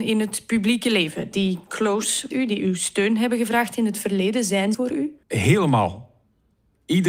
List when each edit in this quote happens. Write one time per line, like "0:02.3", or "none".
0:02.3
0:04.7
0:05.2